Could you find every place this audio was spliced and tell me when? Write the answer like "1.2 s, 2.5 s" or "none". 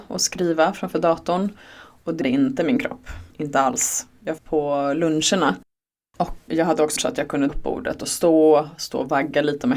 2.2 s, 3.3 s, 4.4 s, 6.5 s, 7.0 s, 7.5 s

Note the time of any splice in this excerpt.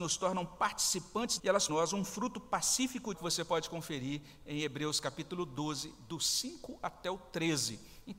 1.4 s, 1.7 s, 3.1 s

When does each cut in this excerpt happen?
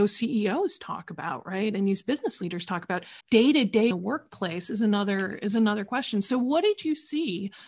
3.2 s, 3.9 s

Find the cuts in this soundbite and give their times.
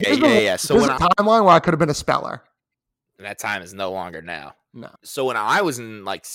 2.8 s, 5.0 s

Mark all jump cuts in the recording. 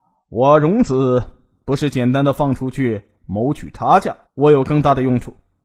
4.3 s

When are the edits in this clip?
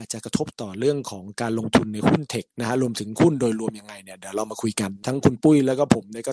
2.5 s

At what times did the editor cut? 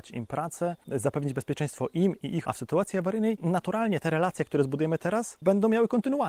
2.4 s

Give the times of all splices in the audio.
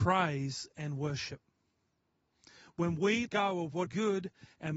3.3 s, 3.9 s

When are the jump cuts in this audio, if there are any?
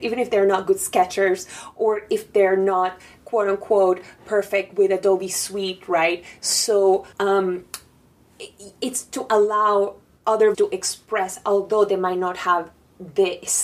7.1 s, 10.5 s

